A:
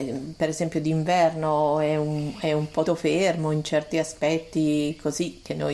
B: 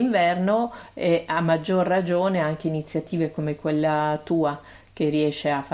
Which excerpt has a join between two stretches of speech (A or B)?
A